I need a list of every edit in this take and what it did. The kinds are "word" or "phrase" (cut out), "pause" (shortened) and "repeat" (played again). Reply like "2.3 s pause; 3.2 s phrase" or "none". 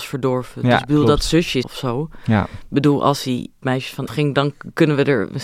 1.6 s word; 3.6 s word; 4.1 s word

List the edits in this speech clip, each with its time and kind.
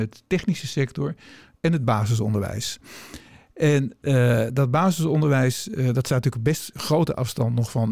none

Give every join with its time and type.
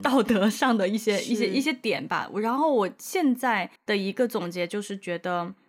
3.8 s pause

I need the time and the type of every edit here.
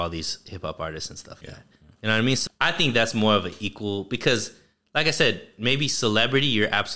1.4 s word; 2.5 s word

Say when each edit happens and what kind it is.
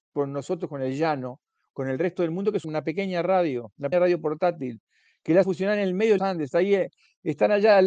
2.6 s word; 3.9 s word; 5.4 s word; 6.2 s word

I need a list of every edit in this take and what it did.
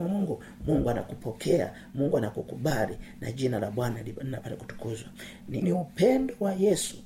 5.6 s word

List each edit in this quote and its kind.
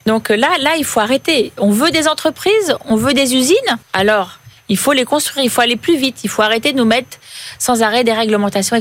3.8 s pause

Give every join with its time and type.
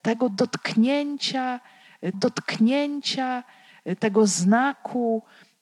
2.1 s repeat

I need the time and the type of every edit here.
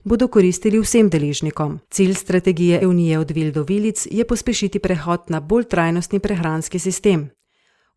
1.8 s pause; 2.8 s word

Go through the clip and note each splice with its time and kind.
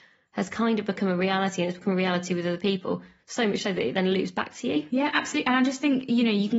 none

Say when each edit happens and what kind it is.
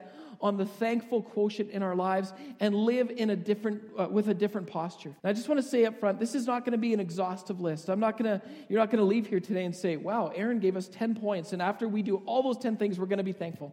5.2 s pause

